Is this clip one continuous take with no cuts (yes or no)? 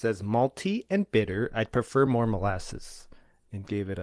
yes